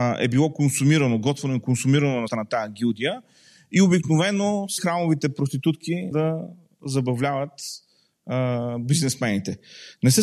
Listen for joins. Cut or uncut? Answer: cut